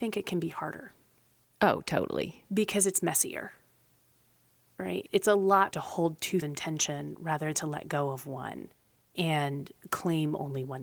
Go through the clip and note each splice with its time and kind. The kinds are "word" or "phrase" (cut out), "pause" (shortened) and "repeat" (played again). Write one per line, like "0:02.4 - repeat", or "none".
0:05.7 - word
0:06.4 - word
0:07.5 - word

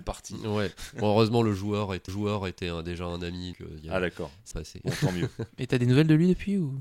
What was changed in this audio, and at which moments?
0:02.1 - repeat
0:03.5 - word
0:04.5 - phrase

